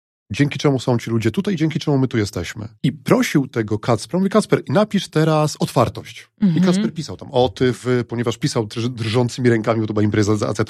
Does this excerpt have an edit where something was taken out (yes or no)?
yes